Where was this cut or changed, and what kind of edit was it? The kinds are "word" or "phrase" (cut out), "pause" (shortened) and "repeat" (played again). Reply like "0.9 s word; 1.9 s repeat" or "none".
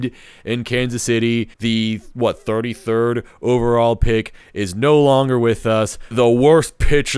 1.5 s pause; 6.1 s word